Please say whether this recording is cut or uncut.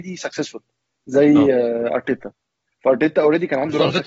uncut